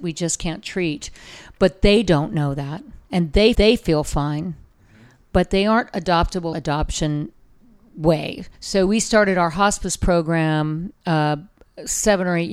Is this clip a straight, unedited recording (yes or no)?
no